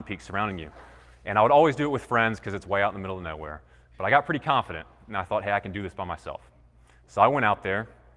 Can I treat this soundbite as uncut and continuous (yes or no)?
yes